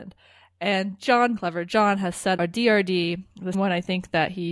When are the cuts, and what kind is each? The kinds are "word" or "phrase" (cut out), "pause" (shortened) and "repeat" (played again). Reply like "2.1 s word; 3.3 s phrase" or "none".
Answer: 1.4 s word; 2.4 s word; 3.5 s word

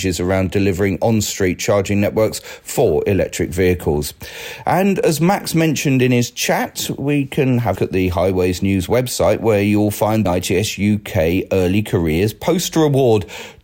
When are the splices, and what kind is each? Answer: 7.8 s phrase; 10.3 s phrase

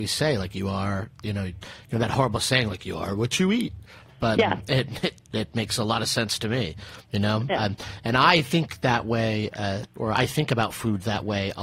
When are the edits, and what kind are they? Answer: 4.4 s word

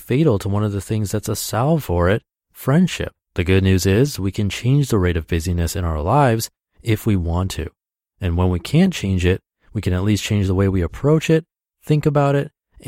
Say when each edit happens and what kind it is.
3.2 s pause

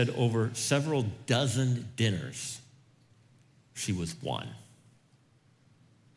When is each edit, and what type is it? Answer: none

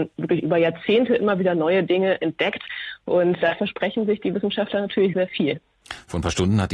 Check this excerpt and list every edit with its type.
3.4 s word; 5.1 s word

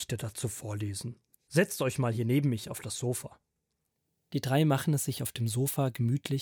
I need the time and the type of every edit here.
none

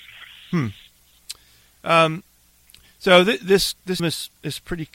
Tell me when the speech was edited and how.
4.0 s word

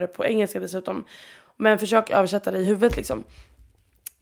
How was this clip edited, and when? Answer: none

